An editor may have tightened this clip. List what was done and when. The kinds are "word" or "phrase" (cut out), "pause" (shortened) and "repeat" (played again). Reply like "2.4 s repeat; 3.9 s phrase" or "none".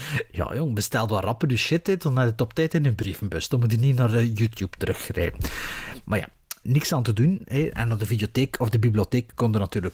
6.6 s word